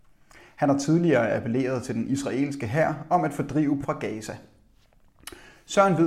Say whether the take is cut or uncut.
cut